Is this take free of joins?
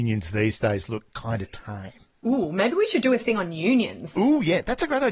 yes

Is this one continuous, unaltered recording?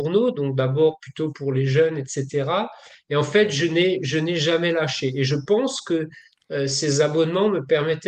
yes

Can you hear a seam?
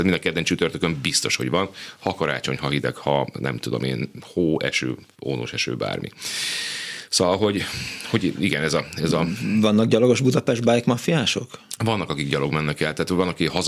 no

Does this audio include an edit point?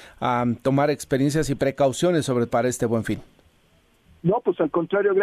yes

